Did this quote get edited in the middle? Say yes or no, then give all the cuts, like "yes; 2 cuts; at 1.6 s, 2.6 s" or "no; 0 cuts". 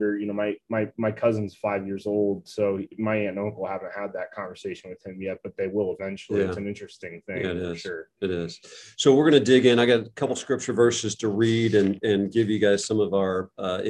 no; 0 cuts